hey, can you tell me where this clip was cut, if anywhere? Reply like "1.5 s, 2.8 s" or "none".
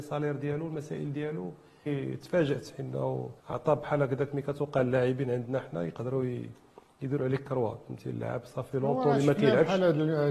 1.9 s, 3.4 s